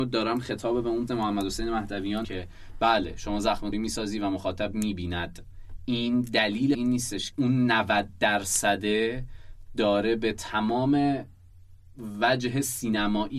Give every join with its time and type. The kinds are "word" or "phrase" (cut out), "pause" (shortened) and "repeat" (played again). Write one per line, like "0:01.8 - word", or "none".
0:01.1 - word
0:02.2 - word
0:03.7 - word
0:06.7 - word
0:07.3 - word